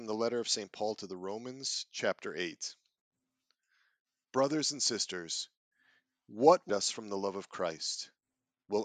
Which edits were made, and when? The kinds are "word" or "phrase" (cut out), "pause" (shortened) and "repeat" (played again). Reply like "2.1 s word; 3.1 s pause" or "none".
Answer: 6.7 s word